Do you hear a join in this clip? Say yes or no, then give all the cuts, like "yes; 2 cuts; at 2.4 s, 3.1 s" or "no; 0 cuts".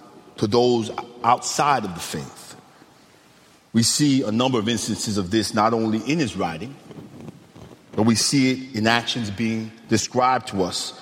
no; 0 cuts